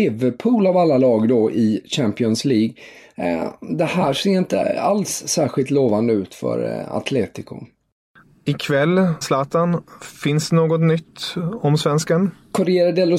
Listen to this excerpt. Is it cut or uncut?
cut